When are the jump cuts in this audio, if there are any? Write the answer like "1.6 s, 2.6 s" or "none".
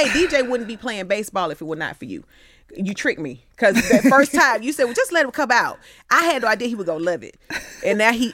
none